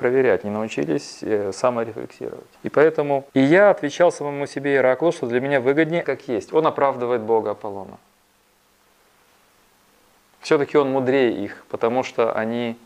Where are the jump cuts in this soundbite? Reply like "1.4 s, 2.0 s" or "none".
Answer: 2.5 s, 3.3 s, 6.0 s